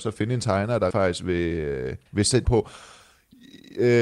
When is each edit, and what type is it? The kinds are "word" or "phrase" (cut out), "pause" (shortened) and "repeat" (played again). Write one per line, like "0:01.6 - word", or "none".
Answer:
0:00.9 - word
0:02.1 - pause
0:02.4 - word